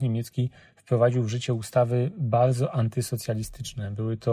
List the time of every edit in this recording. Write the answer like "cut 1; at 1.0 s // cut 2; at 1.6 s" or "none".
none